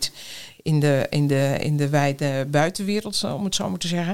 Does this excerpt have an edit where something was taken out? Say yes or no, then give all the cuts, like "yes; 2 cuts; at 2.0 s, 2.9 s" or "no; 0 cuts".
no; 0 cuts